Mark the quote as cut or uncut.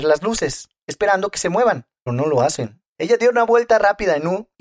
cut